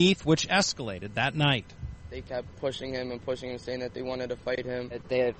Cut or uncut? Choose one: uncut